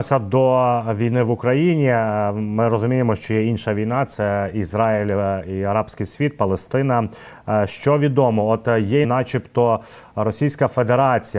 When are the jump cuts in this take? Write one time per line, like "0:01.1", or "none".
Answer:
0:09.0